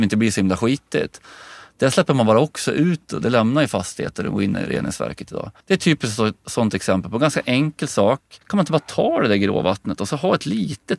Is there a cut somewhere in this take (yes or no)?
yes